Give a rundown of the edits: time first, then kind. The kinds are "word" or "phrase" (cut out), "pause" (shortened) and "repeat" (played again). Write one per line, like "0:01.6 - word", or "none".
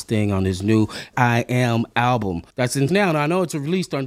0:01.1 - word
0:02.5 - pause
0:02.9 - word